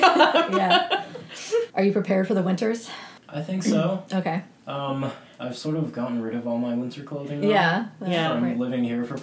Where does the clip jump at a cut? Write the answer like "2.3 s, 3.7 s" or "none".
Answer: 1.7 s, 3.2 s